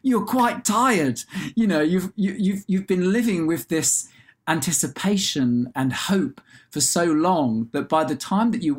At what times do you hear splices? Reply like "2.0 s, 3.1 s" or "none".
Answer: 5.7 s